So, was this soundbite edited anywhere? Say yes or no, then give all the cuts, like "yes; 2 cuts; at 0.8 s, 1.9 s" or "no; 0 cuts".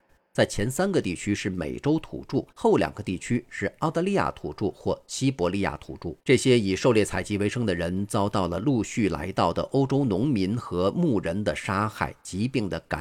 yes; 2 cuts; at 2.5 s, 6.2 s